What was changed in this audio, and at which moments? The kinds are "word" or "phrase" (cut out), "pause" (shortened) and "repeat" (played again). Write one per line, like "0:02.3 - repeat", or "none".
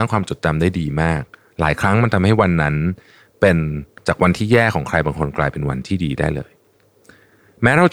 none